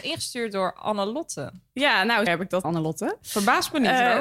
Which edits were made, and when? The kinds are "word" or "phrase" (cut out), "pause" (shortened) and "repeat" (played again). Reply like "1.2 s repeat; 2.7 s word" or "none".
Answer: 2.3 s word; 2.6 s word